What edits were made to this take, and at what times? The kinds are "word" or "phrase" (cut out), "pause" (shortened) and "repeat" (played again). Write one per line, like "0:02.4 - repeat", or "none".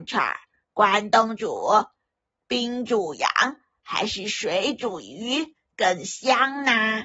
none